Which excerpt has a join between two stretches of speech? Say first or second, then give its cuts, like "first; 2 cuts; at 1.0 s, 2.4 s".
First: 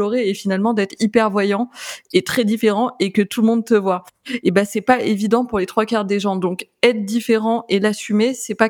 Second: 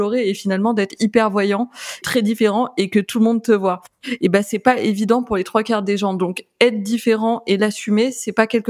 second; 1 cut; at 2.0 s